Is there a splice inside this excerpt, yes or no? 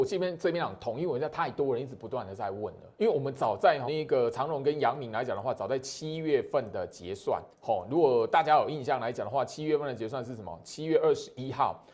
yes